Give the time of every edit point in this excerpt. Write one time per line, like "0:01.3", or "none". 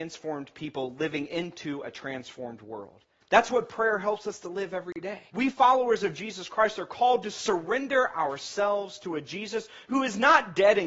0:03.2
0:05.3